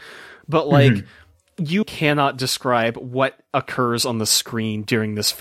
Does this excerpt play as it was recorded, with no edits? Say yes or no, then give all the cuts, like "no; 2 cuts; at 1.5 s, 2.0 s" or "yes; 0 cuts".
no; 1 cut; at 1.8 s